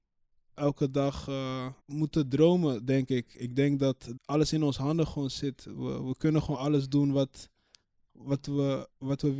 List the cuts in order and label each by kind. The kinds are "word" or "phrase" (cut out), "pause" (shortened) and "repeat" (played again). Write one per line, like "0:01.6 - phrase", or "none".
0:01.8 - pause
0:04.2 - word